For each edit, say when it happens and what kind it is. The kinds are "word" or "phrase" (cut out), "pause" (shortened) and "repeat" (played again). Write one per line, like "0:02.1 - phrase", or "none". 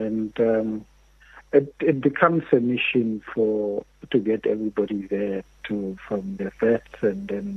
none